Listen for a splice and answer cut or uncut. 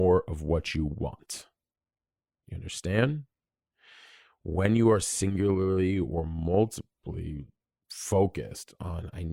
uncut